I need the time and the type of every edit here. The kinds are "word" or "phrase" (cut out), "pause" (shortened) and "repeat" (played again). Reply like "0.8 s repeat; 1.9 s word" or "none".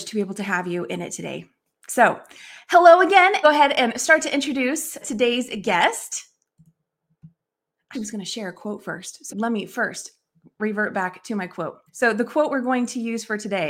3.4 s phrase; 5.0 s word; 7.9 s word; 9.3 s word; 11.9 s pause